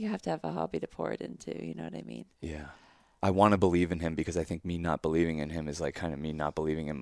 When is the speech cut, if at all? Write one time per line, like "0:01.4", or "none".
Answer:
none